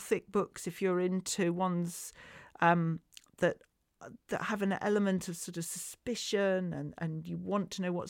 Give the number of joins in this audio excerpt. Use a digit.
1